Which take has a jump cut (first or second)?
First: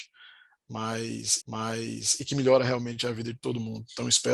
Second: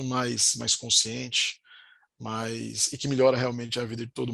first